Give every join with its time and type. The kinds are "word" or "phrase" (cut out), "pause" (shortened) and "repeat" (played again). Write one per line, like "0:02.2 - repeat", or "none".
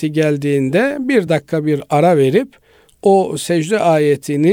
none